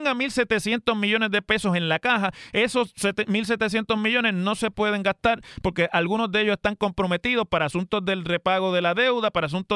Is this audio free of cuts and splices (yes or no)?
yes